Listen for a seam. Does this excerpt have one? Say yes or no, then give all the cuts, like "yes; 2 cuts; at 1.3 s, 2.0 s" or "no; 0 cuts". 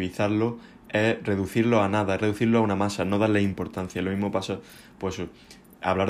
no; 0 cuts